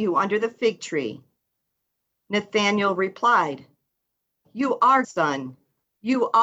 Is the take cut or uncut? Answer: cut